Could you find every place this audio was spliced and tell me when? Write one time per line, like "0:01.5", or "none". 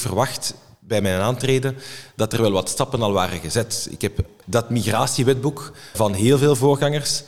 0:04.4
0:05.9